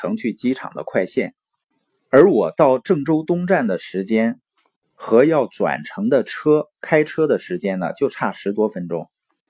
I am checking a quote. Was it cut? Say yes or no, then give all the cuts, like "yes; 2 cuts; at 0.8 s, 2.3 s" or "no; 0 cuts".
no; 0 cuts